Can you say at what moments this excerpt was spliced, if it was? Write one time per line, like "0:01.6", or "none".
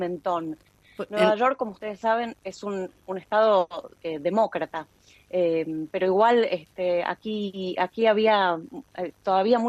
none